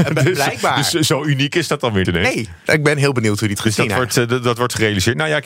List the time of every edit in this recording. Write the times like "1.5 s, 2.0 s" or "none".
2.0 s, 3.6 s